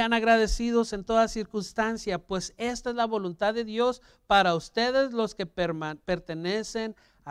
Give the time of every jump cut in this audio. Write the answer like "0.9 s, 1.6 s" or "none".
none